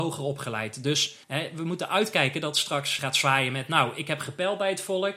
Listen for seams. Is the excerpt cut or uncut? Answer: cut